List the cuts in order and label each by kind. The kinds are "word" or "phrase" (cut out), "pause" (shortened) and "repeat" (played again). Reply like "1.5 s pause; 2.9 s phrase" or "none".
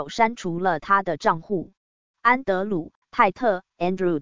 1.8 s pause